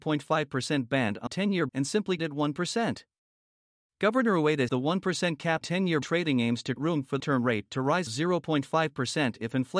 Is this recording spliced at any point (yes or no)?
yes